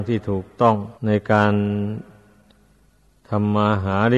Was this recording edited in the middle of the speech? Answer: yes; 1 cut; at 1.0 s

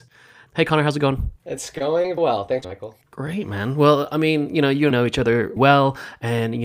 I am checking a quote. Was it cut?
yes; 5 cuts; at 1.4 s, 2.2 s, 2.6 s, 4.9 s, 5.6 s

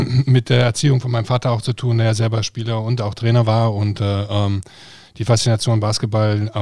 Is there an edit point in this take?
no; 0 cuts

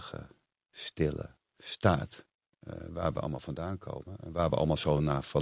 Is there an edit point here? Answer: no; 0 cuts

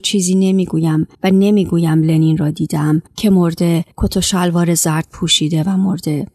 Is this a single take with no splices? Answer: no; 3 cuts; at 1.1 s, 3.1 s, 3.9 s

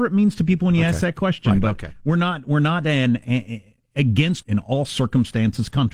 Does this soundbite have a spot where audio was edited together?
yes; 1 cut; at 4.4 s

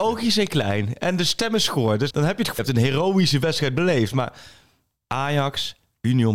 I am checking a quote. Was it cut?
yes; 2 cuts; at 2.1 s, 2.6 s

